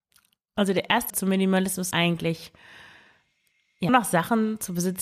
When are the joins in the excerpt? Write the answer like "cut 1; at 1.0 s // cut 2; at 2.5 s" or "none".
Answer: cut 1; at 1.1 s // cut 2; at 1.9 s // cut 3; at 3.9 s